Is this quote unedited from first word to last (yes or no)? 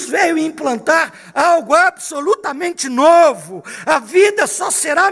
yes